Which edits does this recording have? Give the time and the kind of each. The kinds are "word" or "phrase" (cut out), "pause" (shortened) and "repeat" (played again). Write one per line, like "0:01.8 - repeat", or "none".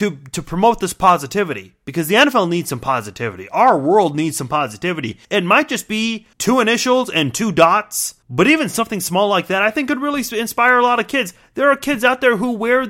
0:05.2 - pause
0:06.3 - pause
0:08.2 - pause